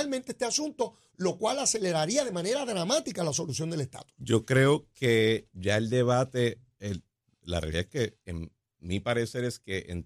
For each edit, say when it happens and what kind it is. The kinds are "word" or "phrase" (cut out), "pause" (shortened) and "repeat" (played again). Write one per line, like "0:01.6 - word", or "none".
none